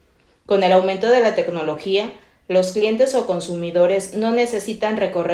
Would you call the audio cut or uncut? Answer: uncut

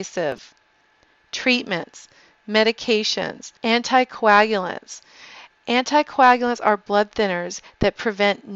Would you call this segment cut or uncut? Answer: cut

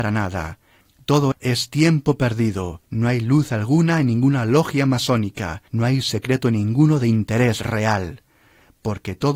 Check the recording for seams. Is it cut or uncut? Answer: cut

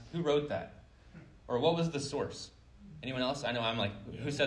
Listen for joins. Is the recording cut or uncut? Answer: uncut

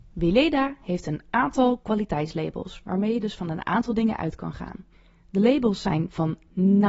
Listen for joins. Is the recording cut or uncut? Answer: uncut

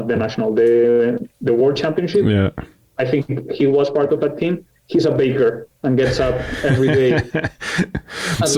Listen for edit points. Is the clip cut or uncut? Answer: uncut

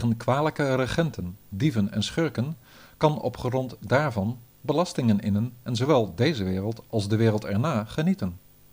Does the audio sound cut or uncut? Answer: uncut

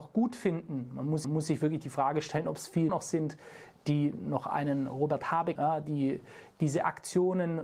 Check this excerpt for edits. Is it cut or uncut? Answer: cut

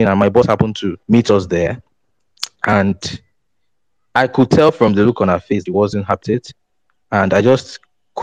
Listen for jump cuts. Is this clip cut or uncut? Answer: cut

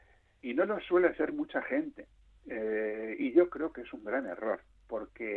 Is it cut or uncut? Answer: uncut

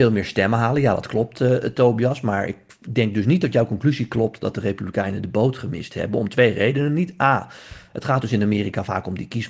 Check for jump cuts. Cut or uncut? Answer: uncut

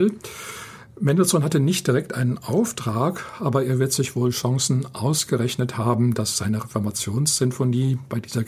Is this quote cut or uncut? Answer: uncut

